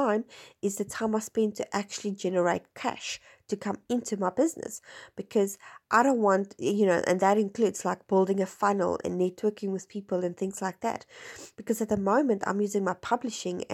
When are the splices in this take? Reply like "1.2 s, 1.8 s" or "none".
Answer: none